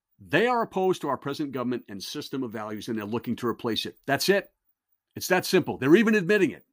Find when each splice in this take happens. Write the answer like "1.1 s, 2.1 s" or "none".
none

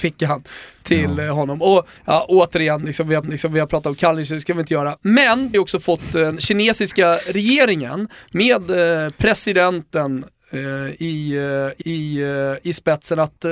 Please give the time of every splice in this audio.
2.0 s, 3.2 s, 5.5 s, 11.8 s

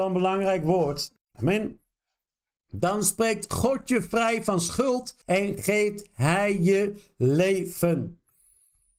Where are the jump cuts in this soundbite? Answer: 1.2 s, 5.2 s

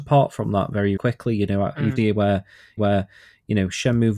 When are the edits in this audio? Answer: 1.0 s, 2.0 s, 2.8 s

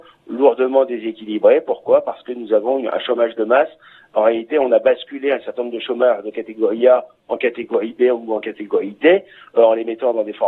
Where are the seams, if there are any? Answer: none

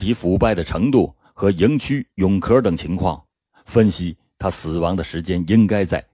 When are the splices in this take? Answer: none

